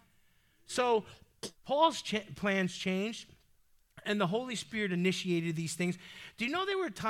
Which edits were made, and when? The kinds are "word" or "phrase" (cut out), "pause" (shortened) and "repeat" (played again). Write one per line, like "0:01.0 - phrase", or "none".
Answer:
0:01.6 - pause